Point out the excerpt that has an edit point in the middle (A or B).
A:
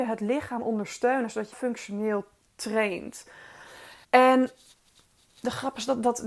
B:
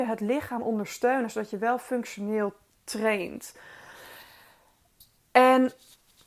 A